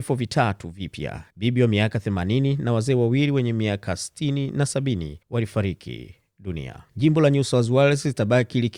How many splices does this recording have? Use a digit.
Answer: 3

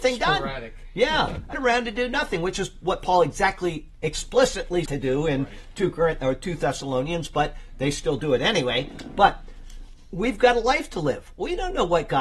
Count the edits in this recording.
2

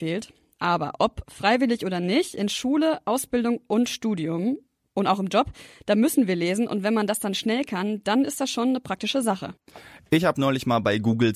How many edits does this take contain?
0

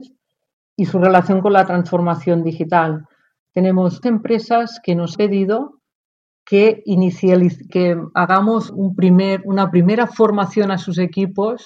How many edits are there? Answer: 4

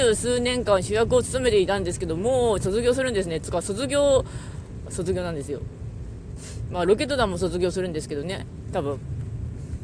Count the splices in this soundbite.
1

